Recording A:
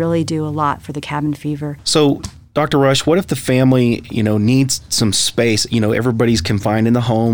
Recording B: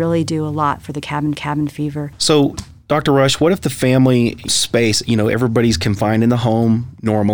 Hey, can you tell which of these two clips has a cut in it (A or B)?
B